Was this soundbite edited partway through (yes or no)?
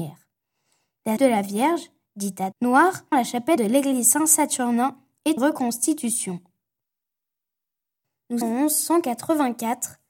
yes